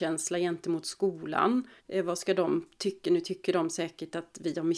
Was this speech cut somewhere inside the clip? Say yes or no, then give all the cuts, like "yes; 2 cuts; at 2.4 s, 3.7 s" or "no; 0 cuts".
yes; 1 cut; at 1.8 s